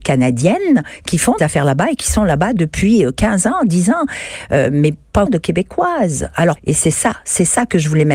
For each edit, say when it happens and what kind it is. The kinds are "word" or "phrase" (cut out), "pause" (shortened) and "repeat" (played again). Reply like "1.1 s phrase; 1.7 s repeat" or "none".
1.4 s word; 5.3 s word; 6.6 s word